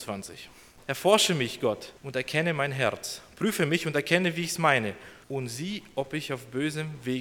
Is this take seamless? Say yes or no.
no